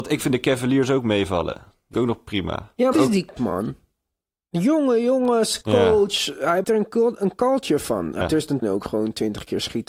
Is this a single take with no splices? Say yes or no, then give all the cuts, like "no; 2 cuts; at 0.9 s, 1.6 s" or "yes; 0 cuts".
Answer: no; 7 cuts; at 1.9 s, 2.9 s, 3.4 s, 5.6 s, 6.6 s, 8.2 s, 8.6 s